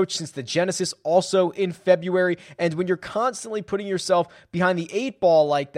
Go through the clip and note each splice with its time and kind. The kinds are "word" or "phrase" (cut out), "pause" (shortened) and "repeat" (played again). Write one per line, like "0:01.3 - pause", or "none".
none